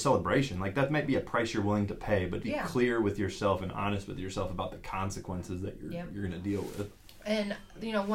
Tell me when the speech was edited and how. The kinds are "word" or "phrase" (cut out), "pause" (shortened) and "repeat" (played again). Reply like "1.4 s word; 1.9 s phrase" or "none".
2.4 s word